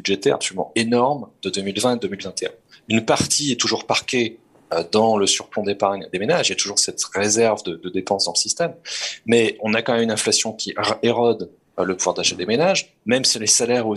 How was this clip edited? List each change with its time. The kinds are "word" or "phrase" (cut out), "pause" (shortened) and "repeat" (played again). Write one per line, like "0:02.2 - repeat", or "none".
none

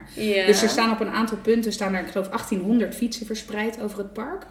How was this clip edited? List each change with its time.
none

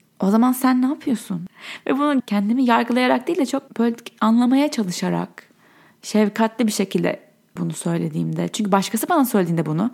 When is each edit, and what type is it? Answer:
0:02.2 - word
0:03.7 - word
0:07.6 - word

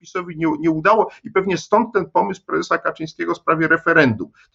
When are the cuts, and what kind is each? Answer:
none

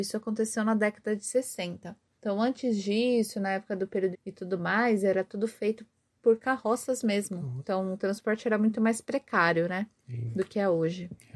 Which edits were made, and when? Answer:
0:02.1 - pause
0:04.1 - phrase

